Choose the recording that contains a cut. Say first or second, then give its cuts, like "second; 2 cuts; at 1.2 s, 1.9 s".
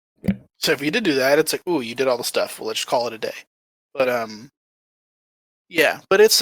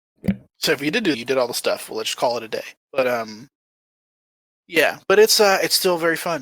second; 2 cuts; at 1.1 s, 2.8 s